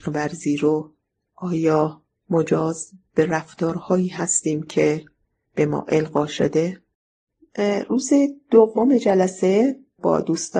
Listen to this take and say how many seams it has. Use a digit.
0